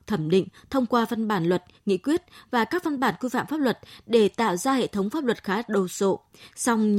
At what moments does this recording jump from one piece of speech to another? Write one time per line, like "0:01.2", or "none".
none